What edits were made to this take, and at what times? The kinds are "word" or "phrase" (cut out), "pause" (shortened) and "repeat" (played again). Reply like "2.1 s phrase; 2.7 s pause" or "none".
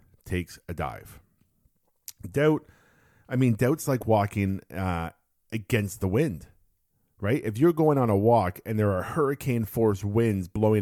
none